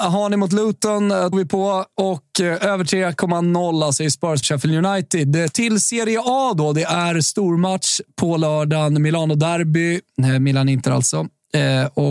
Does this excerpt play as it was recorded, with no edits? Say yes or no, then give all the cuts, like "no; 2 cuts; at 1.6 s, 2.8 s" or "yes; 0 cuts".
no; 2 cuts; at 1.3 s, 4.4 s